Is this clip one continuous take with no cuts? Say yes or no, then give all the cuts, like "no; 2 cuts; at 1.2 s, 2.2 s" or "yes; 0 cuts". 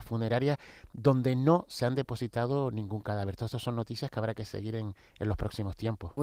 yes; 0 cuts